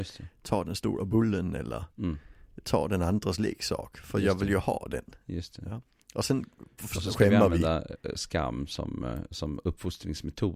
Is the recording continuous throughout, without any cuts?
yes; 0 cuts

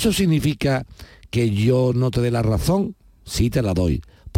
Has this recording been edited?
no; 0 cuts

